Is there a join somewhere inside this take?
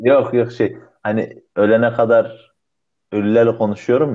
no; 0 cuts

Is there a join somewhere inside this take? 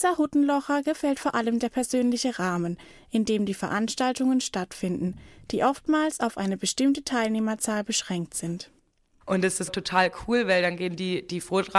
no; 0 cuts

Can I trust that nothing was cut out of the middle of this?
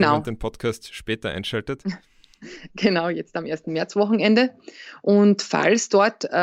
yes; 0 cuts

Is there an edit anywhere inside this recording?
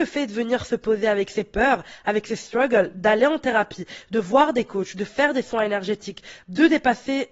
no; 0 cuts

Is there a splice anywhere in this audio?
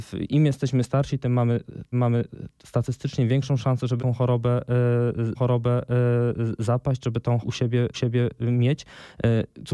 yes; 5 cuts; at 1.9 s, 4.0 s, 5.3 s, 7.4 s, 7.9 s

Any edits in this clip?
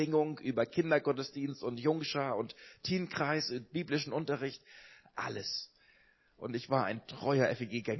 no; 0 cuts

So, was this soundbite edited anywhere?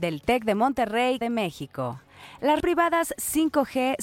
yes; 2 cuts; at 1.2 s, 2.6 s

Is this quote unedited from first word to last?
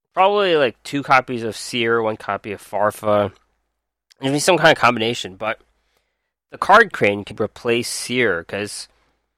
no; 2 cuts; at 6.9 s, 7.3 s

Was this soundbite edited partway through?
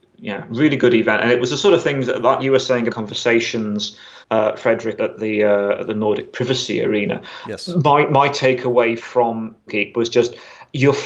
yes; 5 cuts; at 2.4 s, 2.9 s, 4.2 s, 5.0 s, 9.7 s

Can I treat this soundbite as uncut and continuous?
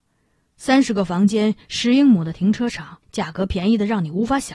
no; 1 cut; at 3.0 s

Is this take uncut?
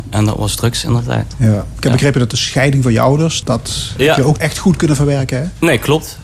no; 2 cuts; at 3.4 s, 4.4 s

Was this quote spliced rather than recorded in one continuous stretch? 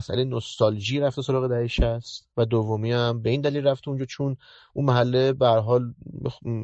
no; 0 cuts

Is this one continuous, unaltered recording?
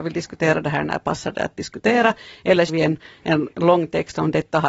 no; 1 cut; at 2.7 s

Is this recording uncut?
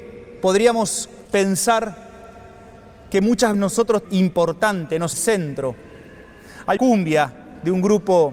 no; 5 cuts; at 1.3 s, 3.5 s, 4.0 s, 5.1 s, 6.8 s

